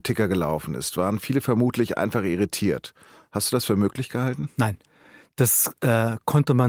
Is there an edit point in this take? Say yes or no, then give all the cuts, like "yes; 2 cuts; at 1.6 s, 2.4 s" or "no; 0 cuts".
no; 0 cuts